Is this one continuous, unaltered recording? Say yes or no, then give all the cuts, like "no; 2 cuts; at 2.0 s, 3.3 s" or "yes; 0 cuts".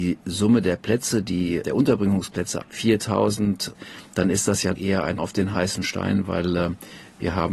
no; 4 cuts; at 1.6 s, 2.6 s, 4.8 s, 5.2 s